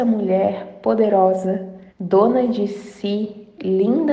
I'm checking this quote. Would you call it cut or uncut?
cut